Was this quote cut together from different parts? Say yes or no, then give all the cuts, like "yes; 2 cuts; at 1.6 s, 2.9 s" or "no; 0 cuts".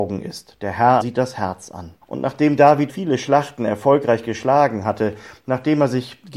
yes; 3 cuts; at 1.0 s, 2.0 s, 2.9 s